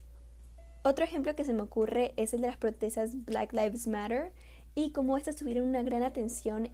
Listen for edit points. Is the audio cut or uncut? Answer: uncut